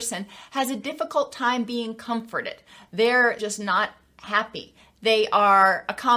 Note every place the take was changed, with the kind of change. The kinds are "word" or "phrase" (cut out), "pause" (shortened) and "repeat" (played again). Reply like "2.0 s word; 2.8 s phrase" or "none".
3.4 s word